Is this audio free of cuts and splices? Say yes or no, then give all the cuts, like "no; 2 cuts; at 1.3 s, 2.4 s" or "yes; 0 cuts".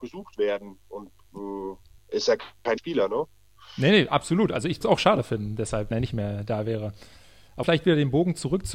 no; 5 cuts; at 2.0 s, 2.8 s, 4.8 s, 5.9 s, 7.6 s